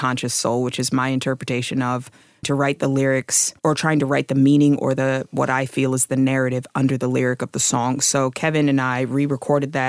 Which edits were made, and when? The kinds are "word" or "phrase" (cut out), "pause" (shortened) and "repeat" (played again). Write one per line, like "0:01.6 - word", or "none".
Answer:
0:02.4 - word
0:03.6 - pause